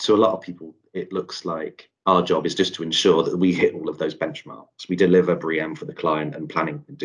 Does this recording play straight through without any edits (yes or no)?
no